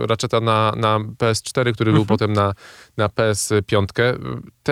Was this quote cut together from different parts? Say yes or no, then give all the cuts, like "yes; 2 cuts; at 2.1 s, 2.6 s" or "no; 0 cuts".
no; 0 cuts